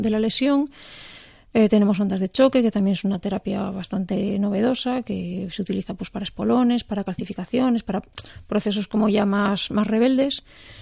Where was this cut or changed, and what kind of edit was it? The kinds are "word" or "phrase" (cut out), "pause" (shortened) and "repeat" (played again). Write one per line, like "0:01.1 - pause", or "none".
none